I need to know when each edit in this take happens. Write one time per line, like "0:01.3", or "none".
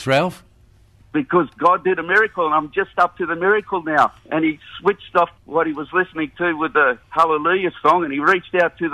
0:04.2
0:05.4
0:07.0